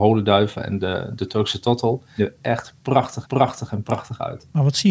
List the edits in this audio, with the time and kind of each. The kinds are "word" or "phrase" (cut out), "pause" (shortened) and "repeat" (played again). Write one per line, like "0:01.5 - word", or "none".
0:02.2 - phrase
0:03.2 - repeat